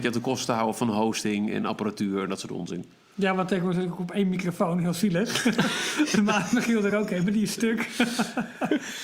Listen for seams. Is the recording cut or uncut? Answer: uncut